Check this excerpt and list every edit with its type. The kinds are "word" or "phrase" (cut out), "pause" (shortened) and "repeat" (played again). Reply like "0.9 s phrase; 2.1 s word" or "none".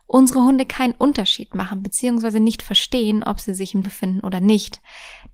3.8 s word